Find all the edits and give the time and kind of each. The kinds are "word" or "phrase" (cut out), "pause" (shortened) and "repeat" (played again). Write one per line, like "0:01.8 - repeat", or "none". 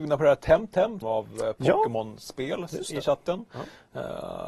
0:01.0 - phrase